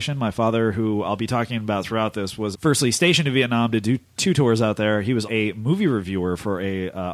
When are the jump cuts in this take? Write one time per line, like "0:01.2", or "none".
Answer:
0:02.5
0:05.3

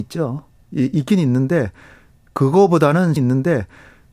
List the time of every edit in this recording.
0:03.2

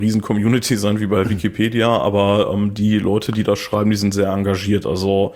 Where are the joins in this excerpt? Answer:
none

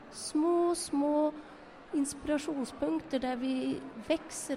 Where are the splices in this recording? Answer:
none

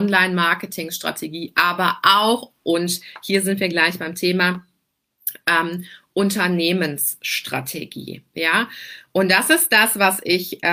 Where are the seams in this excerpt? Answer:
none

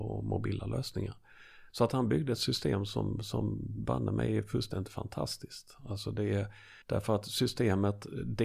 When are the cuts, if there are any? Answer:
0:06.8

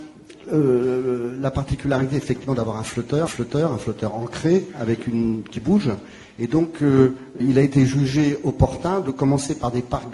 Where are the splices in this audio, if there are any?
0:03.3
0:07.4

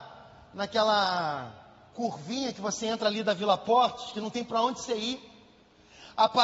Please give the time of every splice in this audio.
none

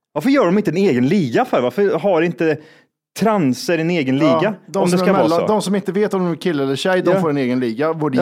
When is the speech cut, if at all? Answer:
none

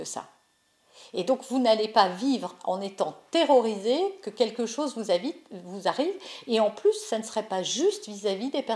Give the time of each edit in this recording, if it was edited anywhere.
none

